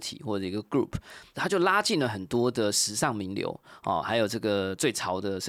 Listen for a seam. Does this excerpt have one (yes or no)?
no